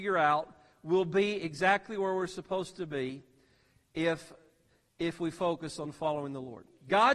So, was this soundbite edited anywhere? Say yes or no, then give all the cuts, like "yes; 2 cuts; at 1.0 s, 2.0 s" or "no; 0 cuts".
no; 0 cuts